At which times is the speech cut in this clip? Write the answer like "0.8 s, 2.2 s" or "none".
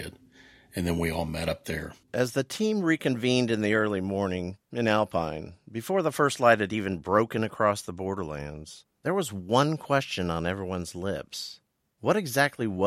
2.0 s